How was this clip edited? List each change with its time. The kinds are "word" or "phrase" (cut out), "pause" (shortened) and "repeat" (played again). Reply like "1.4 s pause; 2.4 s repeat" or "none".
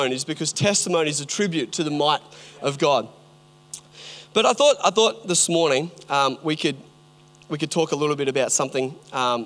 none